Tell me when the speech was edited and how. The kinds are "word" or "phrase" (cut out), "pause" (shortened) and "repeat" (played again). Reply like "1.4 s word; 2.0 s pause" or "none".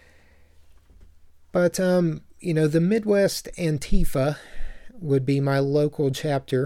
none